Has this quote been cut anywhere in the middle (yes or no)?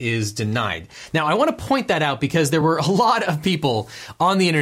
no